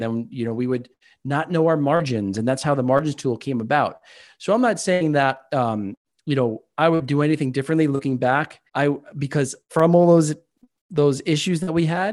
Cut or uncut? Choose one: cut